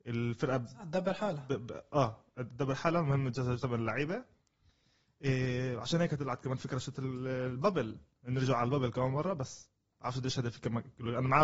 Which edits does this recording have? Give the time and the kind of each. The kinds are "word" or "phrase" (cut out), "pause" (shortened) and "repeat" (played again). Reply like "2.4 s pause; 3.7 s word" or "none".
none